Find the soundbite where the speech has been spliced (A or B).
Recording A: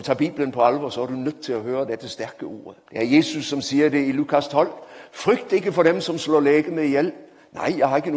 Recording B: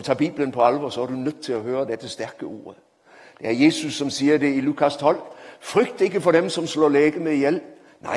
A